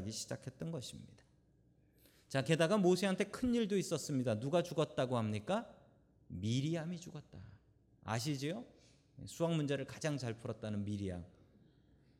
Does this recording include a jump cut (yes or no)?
no